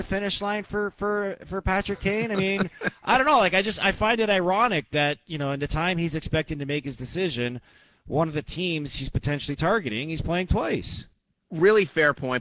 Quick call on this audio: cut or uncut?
uncut